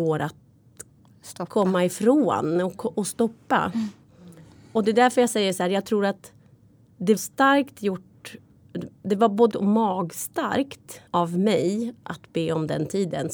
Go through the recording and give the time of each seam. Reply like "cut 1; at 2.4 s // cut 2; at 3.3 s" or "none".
cut 1; at 7.2 s // cut 2; at 9.5 s // cut 3; at 11.1 s